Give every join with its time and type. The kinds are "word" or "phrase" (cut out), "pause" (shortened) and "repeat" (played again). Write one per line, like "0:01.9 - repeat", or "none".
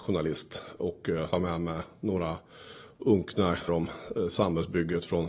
0:01.3 - word
0:03.7 - word